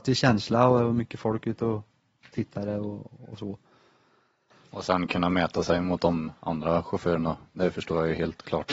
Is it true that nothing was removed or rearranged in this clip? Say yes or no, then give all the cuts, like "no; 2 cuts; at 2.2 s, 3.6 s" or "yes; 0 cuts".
yes; 0 cuts